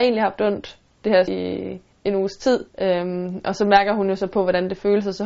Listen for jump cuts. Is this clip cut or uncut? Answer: cut